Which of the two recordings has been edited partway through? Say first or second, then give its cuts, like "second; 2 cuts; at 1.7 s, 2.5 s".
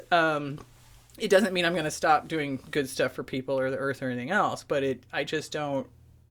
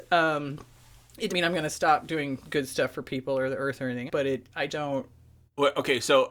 second; 3 cuts; at 1.3 s, 4.1 s, 4.7 s